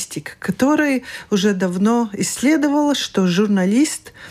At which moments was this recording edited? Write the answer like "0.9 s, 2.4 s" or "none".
none